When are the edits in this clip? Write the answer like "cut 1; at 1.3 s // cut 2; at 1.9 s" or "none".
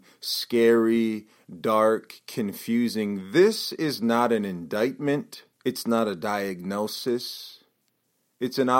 cut 1; at 5.5 s